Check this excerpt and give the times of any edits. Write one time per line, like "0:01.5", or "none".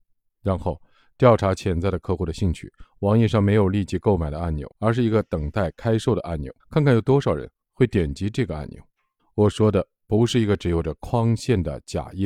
0:04.7
0:06.6
0:09.2